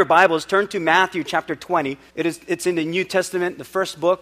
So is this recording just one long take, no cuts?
no; 1 cut; at 2.1 s

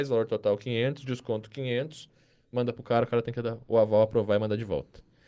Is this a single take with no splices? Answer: yes; 0 cuts

